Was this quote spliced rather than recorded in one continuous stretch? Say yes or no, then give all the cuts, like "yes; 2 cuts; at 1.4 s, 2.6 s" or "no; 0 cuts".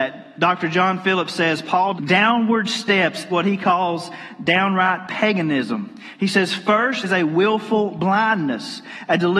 yes; 3 cuts; at 2.0 s, 3.3 s, 7.0 s